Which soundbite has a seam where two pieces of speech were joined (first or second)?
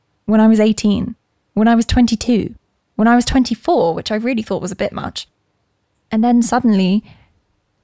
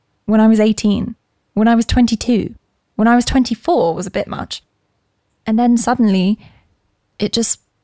second